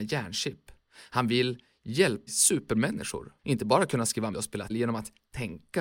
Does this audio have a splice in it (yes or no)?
yes